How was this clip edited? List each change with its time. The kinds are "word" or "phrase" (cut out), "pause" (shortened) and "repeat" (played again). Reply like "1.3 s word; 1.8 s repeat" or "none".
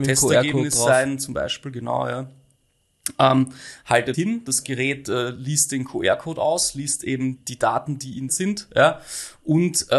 4.1 s word; 7.4 s word; 8.3 s phrase